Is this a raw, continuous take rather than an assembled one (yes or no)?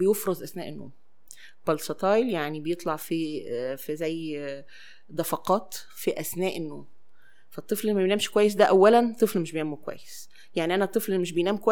yes